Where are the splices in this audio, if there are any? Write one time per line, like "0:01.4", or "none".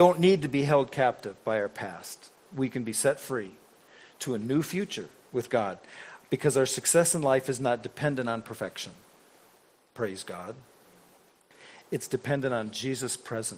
none